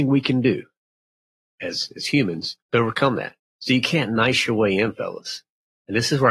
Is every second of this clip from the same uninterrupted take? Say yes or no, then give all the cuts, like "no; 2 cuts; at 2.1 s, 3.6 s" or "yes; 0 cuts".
no; 2 cuts; at 2.6 s, 3.4 s